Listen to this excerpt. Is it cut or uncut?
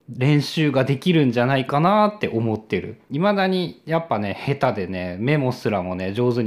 cut